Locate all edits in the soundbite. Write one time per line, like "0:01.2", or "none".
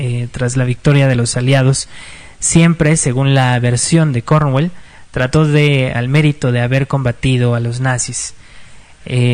0:06.0

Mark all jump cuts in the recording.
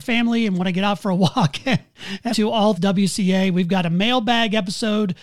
0:02.3
0:02.8

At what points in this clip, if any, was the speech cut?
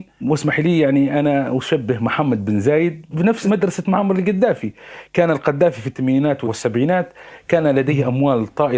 none

